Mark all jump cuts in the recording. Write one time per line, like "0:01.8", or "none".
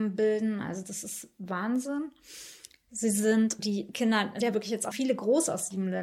0:03.6
0:04.4
0:04.9